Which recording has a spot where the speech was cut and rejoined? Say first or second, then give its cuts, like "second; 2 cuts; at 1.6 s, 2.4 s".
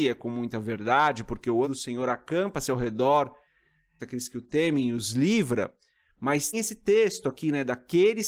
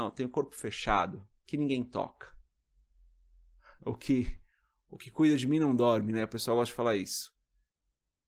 first; 3 cuts; at 1.6 s, 4.0 s, 6.5 s